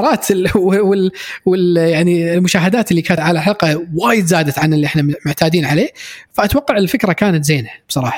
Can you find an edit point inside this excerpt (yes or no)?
yes